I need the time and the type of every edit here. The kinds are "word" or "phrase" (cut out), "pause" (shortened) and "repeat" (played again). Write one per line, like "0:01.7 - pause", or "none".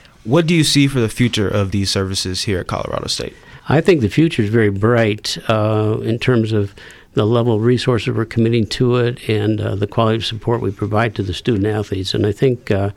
0:03.6 - pause